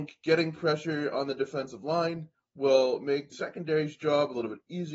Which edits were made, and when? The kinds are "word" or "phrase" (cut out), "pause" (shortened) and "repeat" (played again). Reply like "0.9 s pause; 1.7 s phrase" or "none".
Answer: 2.3 s pause; 3.3 s word